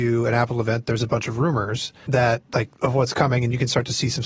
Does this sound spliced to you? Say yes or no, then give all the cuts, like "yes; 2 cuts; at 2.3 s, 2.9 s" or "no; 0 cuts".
yes; 1 cut; at 2.7 s